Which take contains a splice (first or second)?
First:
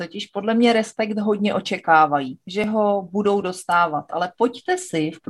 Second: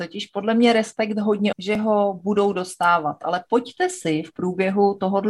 second